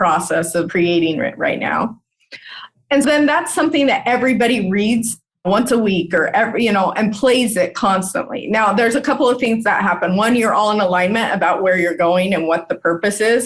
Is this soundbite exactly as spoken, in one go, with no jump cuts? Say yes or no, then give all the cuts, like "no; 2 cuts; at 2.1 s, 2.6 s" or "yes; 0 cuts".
no; 1 cut; at 3.0 s